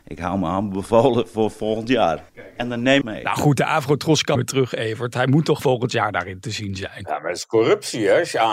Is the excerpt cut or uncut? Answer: cut